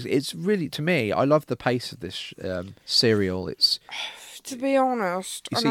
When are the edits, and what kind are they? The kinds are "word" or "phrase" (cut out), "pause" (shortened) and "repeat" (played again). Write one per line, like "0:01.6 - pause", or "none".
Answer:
0:02.8 - pause